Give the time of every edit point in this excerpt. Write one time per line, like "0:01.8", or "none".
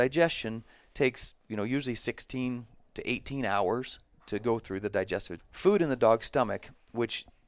0:05.4